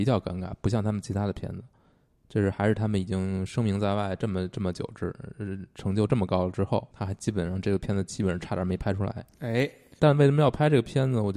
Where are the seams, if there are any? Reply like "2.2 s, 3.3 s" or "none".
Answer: 6.9 s, 10.0 s